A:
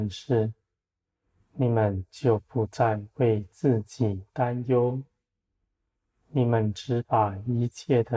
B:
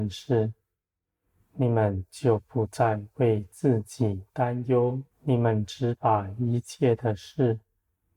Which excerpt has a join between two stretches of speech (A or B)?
B